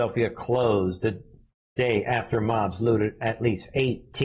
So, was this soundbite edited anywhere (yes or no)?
no